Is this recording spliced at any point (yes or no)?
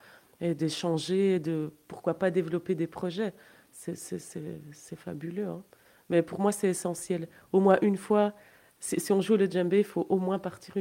no